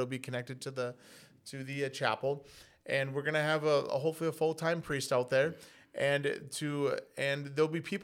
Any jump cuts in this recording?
no; 0 cuts

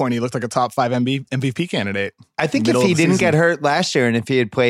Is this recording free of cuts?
yes; 0 cuts

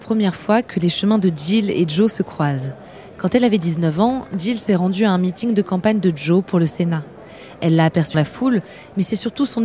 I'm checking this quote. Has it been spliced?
yes; 1 cut; at 8.1 s

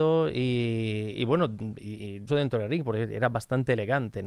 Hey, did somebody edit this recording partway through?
yes; 1 cut; at 2.3 s

